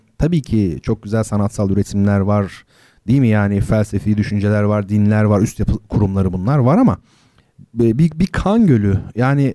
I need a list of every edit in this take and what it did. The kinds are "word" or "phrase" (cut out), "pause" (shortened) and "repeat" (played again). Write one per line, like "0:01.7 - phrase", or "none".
none